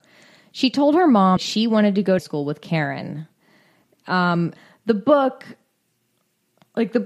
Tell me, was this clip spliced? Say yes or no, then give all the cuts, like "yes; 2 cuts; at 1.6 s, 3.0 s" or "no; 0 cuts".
yes; 3 cuts; at 1.4 s, 2.2 s, 4.6 s